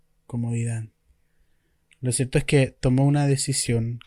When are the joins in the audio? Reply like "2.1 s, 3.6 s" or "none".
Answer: none